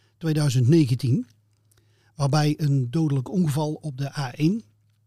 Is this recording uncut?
yes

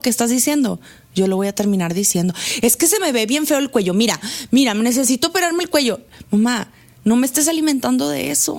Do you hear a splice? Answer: no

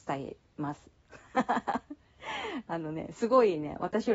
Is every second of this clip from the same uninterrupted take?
yes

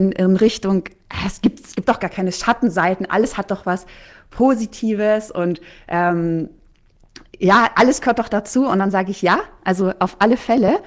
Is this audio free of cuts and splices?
no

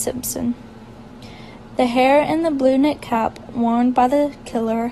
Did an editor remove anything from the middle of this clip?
no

